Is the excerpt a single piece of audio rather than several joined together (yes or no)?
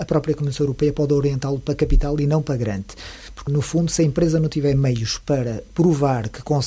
no